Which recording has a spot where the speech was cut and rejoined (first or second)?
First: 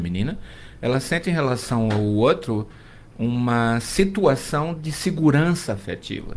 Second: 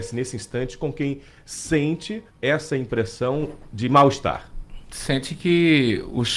second